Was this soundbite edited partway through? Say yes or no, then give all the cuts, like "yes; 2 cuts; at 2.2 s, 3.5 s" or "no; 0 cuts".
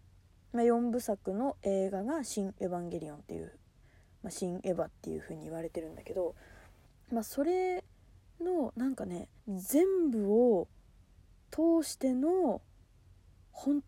yes; 2 cuts; at 6.9 s, 9.4 s